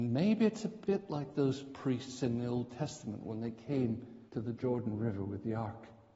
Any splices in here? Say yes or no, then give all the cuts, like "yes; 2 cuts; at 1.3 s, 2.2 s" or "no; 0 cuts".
yes; 1 cut; at 4.3 s